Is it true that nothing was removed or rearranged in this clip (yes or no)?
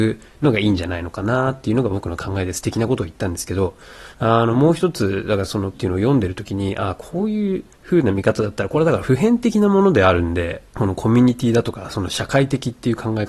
no